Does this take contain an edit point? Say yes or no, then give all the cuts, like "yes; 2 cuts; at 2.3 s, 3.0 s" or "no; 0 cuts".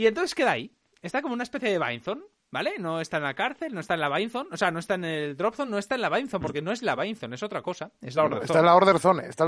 no; 0 cuts